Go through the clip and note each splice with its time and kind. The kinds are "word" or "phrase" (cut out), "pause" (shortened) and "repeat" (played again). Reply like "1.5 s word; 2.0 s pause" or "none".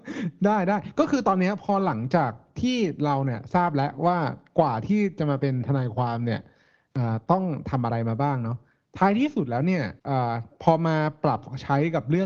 10.0 s pause